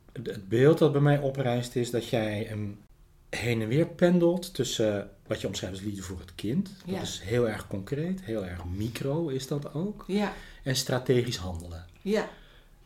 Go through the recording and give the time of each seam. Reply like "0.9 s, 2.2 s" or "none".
none